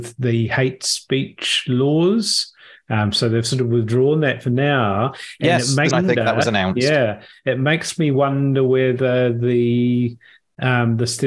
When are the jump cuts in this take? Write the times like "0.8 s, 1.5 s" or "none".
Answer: 5.9 s